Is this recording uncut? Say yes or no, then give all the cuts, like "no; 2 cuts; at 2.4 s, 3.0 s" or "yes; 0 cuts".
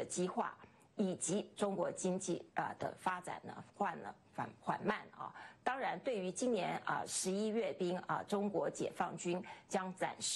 no; 1 cut; at 2.5 s